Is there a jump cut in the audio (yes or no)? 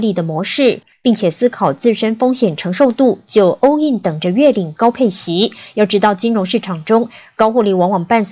no